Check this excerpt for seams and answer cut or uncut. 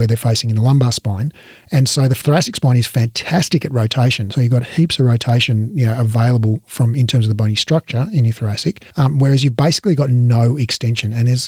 cut